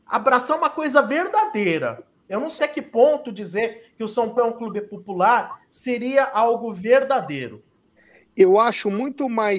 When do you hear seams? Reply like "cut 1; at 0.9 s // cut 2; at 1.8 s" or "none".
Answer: cut 1; at 2.6 s // cut 2; at 4.4 s

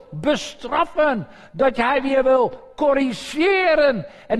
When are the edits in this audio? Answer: none

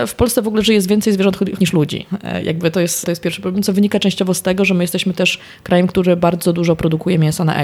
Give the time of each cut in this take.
cut 1; at 1.6 s

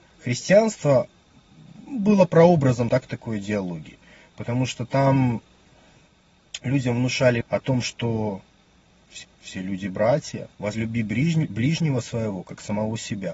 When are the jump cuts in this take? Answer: cut 1; at 2.9 s // cut 2; at 7.4 s // cut 3; at 9.2 s // cut 4; at 10.5 s

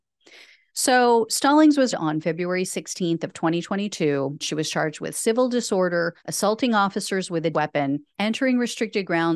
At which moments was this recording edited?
cut 1; at 1.9 s // cut 2; at 4.4 s // cut 3; at 6.2 s // cut 4; at 7.5 s // cut 5; at 8.1 s

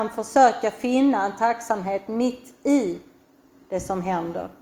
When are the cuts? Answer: none

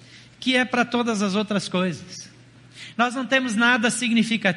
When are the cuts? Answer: none

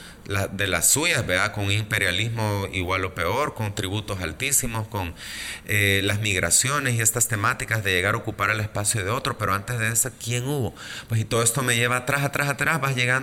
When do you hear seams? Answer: none

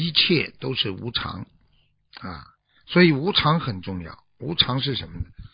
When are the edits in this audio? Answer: none

